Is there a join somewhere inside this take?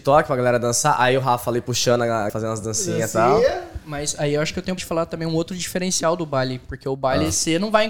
yes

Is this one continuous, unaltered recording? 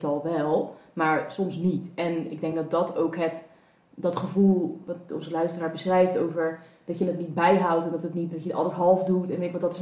yes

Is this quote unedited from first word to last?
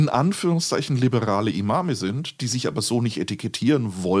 yes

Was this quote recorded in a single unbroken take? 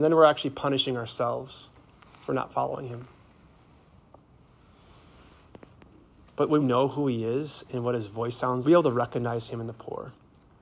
no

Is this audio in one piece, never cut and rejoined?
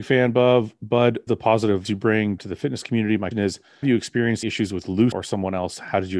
no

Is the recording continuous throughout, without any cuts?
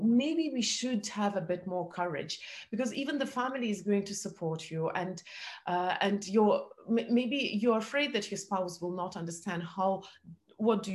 yes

